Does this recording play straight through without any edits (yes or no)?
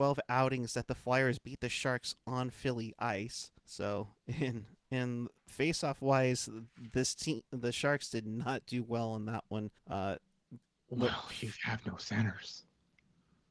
no